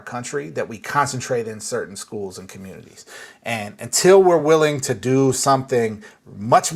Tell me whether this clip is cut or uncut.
uncut